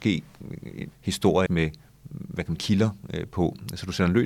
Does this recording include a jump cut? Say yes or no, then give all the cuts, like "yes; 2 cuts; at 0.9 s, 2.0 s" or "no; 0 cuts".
yes; 3 cuts; at 0.9 s, 1.5 s, 2.6 s